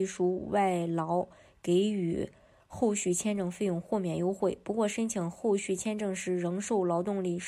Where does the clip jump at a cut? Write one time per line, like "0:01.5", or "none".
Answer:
none